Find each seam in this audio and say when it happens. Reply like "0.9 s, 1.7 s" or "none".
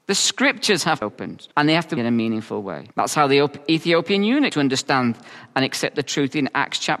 1.0 s, 1.5 s, 2.0 s, 2.9 s, 4.5 s